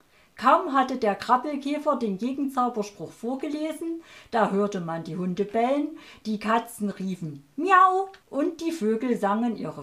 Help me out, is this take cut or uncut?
cut